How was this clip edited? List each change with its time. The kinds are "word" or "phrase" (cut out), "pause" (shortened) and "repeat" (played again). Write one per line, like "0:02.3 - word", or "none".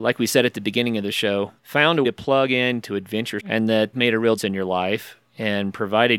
0:01.6 - pause
0:02.0 - word
0:03.4 - word
0:03.9 - word
0:04.4 - word

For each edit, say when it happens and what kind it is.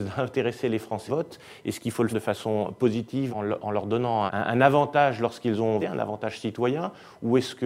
0:01.1 - word
0:02.1 - word
0:03.3 - word
0:04.3 - word
0:05.8 - word

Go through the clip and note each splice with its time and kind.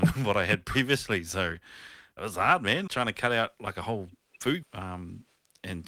0:02.2 - word
0:02.9 - word
0:04.6 - word

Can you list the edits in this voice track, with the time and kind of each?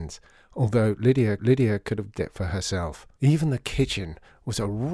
0:01.4 - repeat
0:02.1 - word
0:03.1 - pause

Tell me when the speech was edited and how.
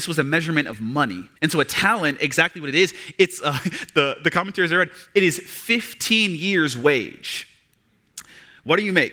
0:01.4 - pause

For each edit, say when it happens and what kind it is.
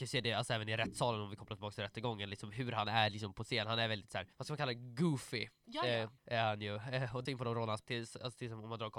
0:04.3 - pause
0:06.2 - pause
0:07.3 - phrase
0:07.8 - word

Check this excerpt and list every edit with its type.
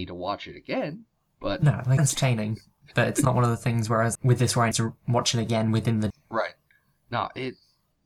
0:02.0 - word
0:04.1 - word
0:04.7 - word
0:06.1 - word

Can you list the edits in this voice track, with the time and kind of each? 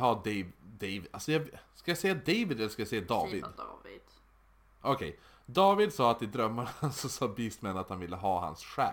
none

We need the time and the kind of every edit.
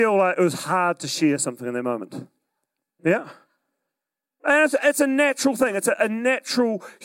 none

